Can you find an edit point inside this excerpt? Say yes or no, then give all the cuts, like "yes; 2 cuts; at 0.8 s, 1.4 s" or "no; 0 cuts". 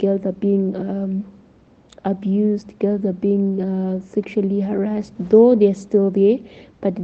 no; 0 cuts